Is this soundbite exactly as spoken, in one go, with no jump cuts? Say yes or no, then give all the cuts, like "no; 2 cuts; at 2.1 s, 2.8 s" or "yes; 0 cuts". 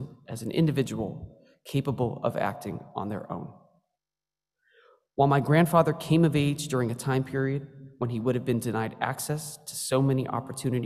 yes; 0 cuts